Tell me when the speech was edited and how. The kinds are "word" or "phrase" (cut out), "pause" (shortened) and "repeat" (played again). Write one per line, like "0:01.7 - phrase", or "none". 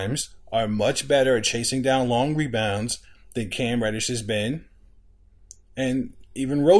none